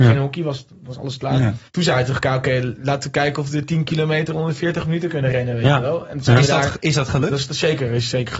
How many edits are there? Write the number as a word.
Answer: one